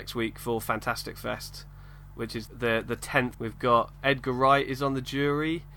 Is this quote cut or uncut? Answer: cut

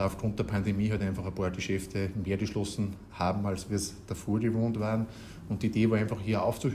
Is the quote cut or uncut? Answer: uncut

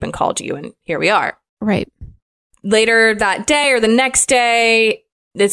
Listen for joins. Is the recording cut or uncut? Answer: uncut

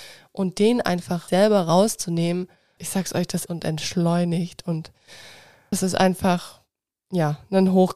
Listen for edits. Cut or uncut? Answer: cut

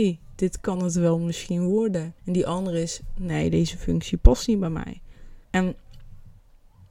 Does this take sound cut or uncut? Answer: cut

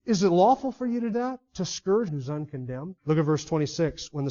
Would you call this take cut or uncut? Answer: cut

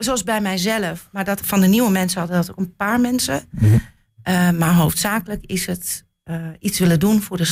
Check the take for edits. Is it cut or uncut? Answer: cut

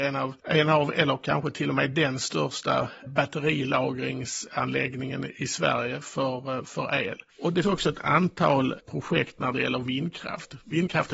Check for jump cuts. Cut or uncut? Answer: cut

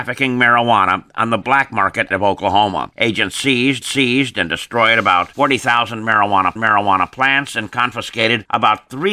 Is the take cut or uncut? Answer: cut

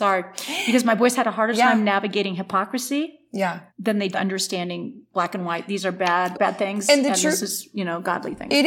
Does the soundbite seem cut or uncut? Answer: cut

